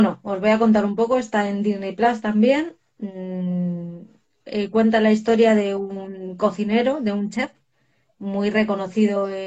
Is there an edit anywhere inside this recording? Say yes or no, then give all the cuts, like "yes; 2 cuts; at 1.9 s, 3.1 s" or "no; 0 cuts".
no; 0 cuts